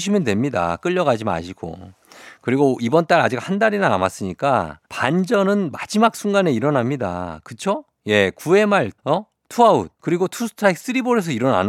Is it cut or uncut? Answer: cut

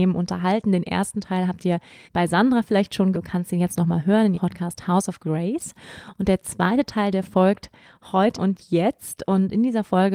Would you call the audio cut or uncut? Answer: cut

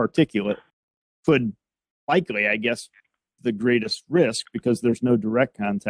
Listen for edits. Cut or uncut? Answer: cut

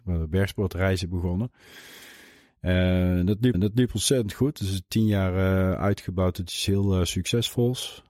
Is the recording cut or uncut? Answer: cut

